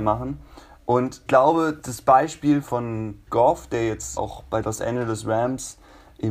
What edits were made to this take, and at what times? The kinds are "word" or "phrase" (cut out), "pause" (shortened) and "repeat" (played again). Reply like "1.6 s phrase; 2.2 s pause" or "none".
1.3 s word; 1.8 s word; 2.6 s word; 3.3 s word; 4.2 s word; 4.6 s word